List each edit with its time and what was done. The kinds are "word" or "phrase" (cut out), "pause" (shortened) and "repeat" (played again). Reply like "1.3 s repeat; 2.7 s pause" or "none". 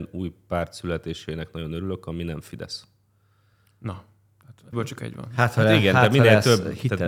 4.7 s word